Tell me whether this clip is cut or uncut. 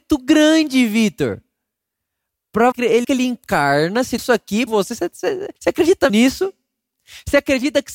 cut